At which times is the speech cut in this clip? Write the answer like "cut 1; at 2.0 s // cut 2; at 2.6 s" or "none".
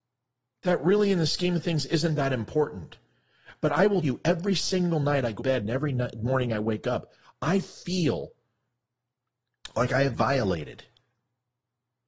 cut 1; at 4.0 s // cut 2; at 5.4 s // cut 3; at 10.1 s